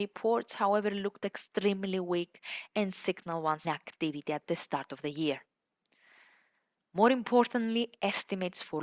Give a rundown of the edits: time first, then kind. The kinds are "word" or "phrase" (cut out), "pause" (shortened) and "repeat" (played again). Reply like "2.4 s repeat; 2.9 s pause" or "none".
3.6 s phrase